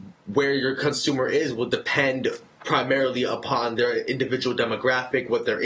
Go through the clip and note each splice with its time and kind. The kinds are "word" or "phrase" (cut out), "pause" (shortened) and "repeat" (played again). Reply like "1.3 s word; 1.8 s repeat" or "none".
none